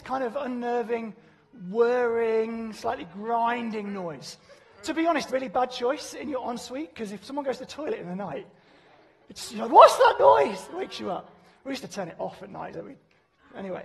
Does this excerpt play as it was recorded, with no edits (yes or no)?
no